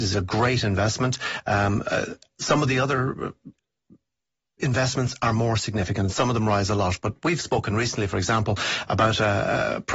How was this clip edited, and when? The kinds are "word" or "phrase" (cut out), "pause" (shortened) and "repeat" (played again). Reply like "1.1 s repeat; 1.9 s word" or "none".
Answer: none